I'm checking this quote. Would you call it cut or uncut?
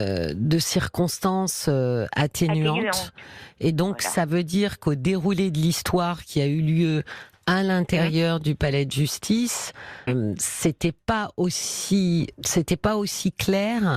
cut